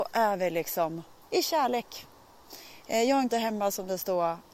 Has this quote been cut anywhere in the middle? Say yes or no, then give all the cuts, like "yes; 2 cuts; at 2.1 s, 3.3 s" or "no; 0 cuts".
yes; 2 cuts; at 1.2 s, 3.3 s